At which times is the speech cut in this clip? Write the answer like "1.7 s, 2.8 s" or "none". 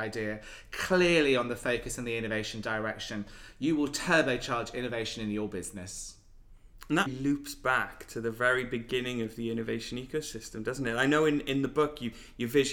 7.1 s